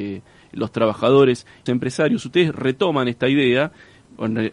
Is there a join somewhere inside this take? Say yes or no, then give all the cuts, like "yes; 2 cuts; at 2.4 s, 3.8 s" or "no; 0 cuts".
yes; 1 cut; at 1.7 s